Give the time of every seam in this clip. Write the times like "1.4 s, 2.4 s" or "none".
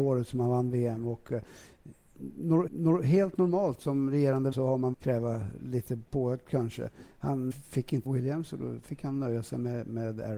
2.7 s, 4.5 s, 4.9 s, 7.5 s, 8.0 s